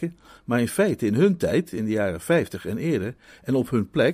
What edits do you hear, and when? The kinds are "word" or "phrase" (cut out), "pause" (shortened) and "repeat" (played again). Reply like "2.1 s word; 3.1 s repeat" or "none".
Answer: none